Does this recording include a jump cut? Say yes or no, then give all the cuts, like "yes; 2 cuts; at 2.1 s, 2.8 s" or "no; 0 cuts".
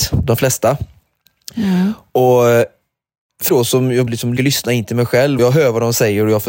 yes; 4 cuts; at 3.5 s, 4.1 s, 4.4 s, 5.4 s